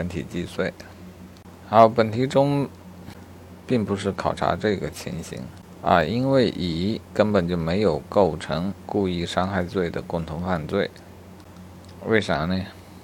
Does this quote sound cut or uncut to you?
uncut